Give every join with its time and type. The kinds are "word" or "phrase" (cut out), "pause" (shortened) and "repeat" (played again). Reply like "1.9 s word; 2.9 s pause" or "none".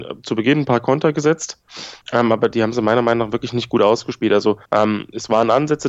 2.0 s pause; 4.6 s pause